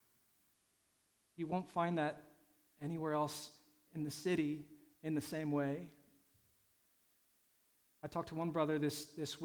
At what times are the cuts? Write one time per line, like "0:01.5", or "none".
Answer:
none